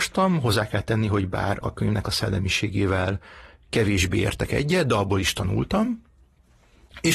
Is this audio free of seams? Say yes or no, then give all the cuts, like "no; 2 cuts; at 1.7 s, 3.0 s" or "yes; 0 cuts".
no; 1 cut; at 1.6 s